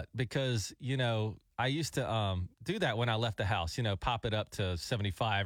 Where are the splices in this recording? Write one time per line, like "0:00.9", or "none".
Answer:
0:02.5